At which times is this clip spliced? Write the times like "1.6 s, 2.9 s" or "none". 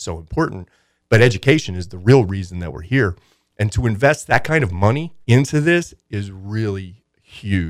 5.2 s